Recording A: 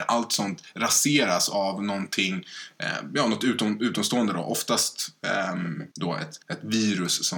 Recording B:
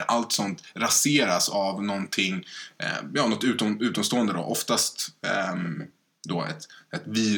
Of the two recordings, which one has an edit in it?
A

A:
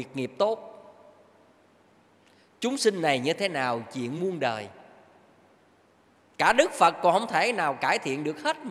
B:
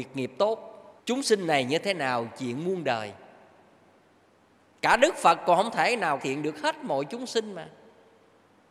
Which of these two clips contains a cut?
B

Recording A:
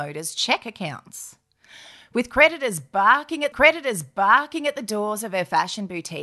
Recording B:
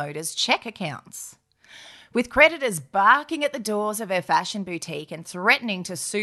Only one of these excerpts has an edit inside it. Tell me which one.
A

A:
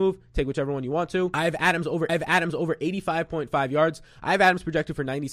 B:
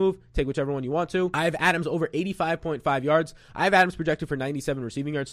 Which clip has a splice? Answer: A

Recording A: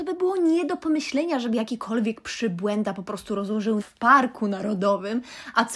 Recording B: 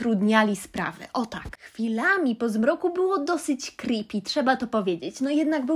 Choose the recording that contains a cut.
A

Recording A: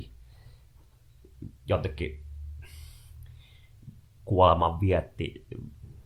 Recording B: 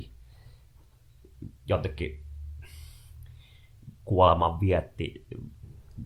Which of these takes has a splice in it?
B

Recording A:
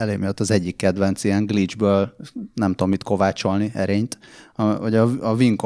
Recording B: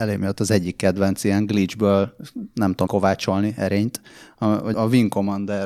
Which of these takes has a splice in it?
B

